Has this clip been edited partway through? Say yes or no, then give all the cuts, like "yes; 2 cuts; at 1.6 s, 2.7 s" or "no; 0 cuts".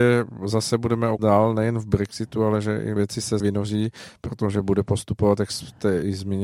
yes; 3 cuts; at 1.2 s, 3.0 s, 3.4 s